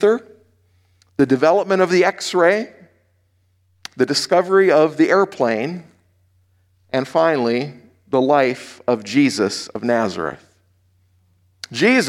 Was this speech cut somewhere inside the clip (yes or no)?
no